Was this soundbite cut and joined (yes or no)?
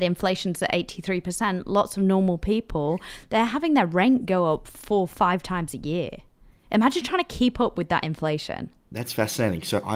no